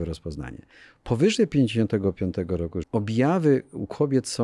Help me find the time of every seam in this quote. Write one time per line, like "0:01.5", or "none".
0:02.8